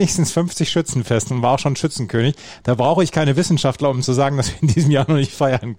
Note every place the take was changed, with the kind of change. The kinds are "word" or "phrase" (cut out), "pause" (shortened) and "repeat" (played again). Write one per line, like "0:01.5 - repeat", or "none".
none